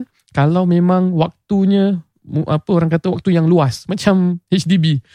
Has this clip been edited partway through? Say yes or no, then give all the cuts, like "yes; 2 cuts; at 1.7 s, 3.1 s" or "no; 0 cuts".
no; 0 cuts